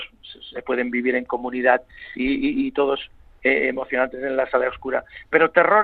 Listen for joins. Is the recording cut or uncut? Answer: uncut